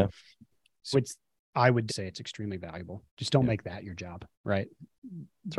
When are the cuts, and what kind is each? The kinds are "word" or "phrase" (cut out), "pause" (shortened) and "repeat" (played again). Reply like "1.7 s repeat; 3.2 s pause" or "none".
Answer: 0.9 s word; 1.9 s word; 3.1 s pause; 4.3 s pause